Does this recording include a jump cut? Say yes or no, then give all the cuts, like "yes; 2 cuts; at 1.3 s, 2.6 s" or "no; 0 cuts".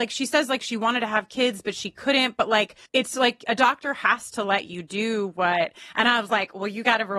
yes; 1 cut; at 2.9 s